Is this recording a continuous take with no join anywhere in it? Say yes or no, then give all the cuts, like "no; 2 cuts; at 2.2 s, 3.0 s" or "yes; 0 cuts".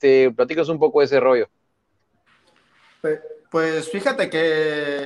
no; 1 cut; at 3.4 s